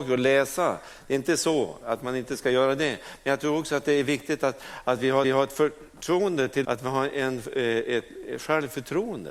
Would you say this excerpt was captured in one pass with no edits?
no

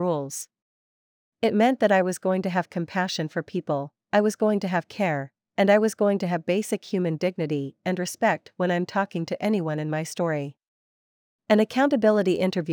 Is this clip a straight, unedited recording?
yes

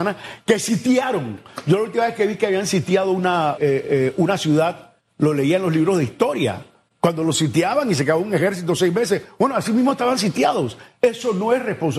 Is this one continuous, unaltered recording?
no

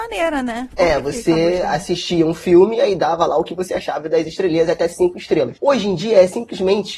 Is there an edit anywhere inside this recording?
no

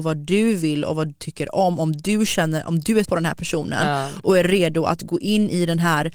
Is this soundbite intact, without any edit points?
no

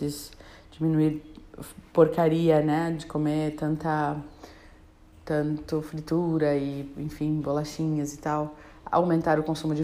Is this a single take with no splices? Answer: yes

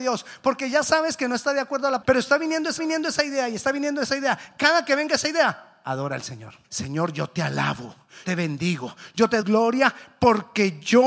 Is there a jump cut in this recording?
yes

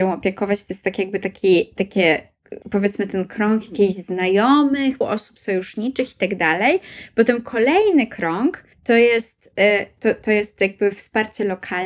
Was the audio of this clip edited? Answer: yes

